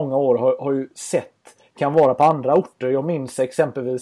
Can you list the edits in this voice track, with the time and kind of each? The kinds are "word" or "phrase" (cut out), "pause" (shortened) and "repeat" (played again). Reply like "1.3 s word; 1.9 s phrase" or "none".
1.8 s word